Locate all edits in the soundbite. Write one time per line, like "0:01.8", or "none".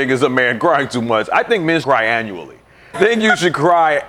0:01.8
0:02.9